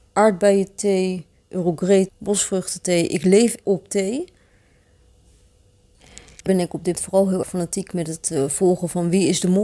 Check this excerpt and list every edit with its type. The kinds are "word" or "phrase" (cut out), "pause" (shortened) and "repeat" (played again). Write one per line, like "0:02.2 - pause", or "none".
0:02.1 - word
0:03.6 - word
0:06.5 - word
0:07.0 - word
0:07.4 - word